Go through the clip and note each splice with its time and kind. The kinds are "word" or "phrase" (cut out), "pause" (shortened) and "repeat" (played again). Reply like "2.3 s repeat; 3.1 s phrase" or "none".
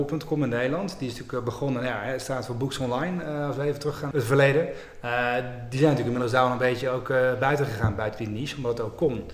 4.1 s phrase